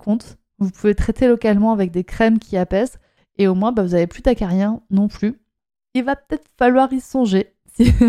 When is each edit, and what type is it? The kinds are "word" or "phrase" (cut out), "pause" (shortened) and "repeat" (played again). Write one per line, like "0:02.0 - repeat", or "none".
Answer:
none